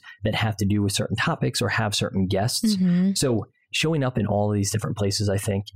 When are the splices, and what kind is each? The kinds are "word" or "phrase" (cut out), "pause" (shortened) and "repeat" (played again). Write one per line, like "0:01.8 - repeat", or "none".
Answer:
none